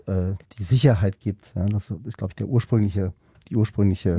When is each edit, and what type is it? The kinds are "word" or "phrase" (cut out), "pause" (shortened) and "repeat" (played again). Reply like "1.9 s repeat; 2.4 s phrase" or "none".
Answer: none